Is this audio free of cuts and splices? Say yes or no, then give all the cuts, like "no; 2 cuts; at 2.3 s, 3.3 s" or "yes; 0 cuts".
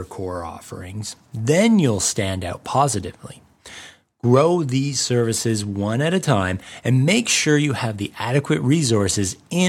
yes; 0 cuts